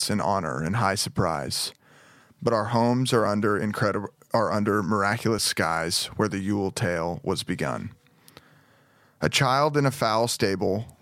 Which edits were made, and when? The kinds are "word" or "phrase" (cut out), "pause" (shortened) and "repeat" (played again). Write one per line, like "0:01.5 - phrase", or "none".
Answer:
none